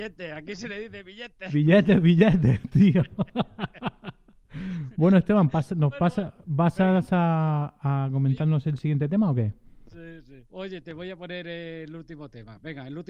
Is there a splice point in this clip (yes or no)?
yes